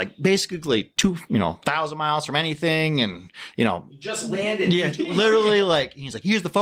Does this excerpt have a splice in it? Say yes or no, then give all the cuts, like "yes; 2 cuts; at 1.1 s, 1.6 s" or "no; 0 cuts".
no; 0 cuts